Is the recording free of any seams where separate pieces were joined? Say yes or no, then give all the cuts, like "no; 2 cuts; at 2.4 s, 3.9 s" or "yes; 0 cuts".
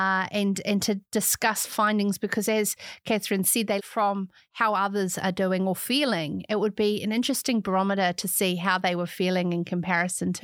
no; 1 cut; at 3.8 s